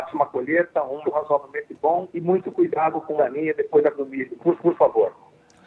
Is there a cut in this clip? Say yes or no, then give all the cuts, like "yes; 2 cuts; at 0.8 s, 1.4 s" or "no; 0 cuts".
yes; 5 cuts; at 1.0 s, 2.1 s, 3.2 s, 3.9 s, 4.6 s